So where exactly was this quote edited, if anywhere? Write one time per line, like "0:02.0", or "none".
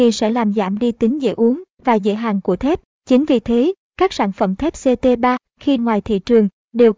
0:05.8